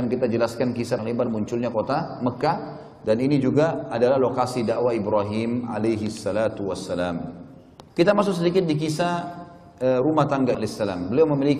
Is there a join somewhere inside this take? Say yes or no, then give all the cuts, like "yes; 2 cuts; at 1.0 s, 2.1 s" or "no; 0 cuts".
yes; 3 cuts; at 1.0 s, 7.9 s, 10.5 s